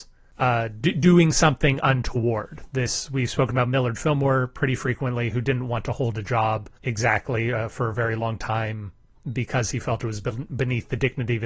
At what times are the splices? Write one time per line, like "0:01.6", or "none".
0:06.7
0:09.1